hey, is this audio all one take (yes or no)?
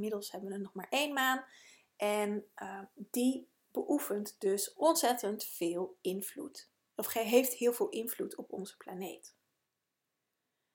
yes